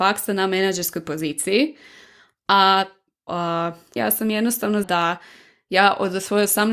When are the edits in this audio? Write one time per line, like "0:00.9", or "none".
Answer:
0:03.3
0:04.0
0:04.8